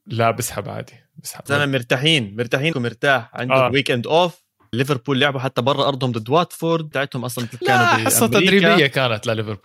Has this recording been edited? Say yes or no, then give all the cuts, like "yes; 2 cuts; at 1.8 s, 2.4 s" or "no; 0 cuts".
yes; 6 cuts; at 1.5 s, 2.7 s, 3.7 s, 4.7 s, 6.9 s, 7.6 s